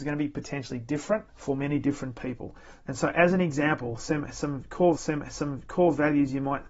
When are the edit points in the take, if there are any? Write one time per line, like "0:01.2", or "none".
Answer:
0:01.3
0:05.0